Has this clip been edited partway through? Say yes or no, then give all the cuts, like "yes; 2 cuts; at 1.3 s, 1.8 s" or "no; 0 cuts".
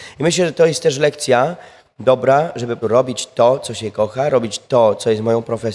yes; 1 cut; at 2.8 s